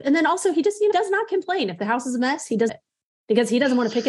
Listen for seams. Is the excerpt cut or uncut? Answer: cut